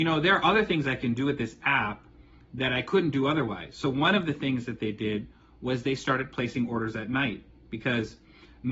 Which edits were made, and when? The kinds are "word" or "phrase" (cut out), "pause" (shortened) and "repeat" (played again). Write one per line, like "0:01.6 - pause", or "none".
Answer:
none